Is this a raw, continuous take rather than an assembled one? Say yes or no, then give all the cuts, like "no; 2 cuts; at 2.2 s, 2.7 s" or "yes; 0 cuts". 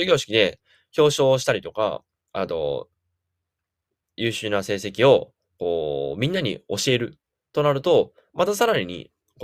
yes; 0 cuts